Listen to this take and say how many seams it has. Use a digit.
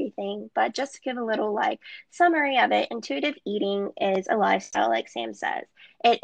0